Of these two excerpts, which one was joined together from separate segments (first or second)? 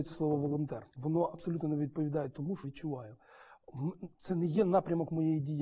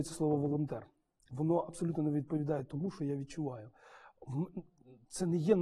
first